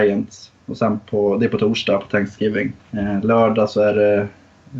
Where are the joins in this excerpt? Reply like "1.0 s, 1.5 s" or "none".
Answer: 2.8 s

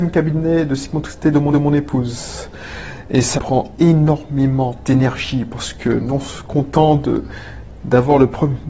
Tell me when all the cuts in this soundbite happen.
1.5 s, 3.4 s

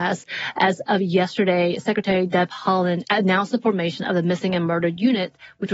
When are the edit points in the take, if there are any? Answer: none

